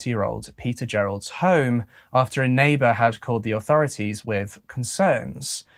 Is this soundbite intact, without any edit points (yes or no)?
yes